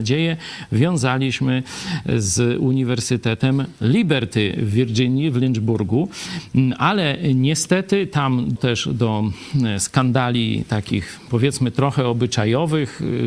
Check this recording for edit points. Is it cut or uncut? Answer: cut